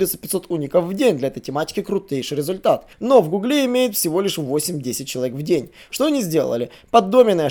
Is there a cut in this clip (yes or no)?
yes